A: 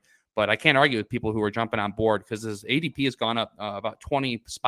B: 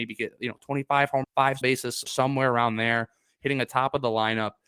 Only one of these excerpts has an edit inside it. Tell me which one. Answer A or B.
B